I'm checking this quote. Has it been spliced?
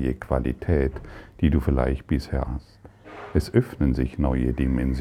yes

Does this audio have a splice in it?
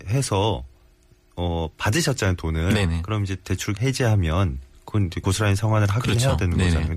yes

